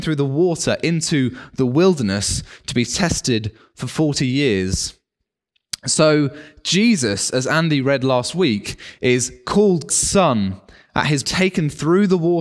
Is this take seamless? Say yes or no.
no